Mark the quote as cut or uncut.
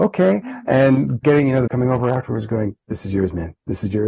cut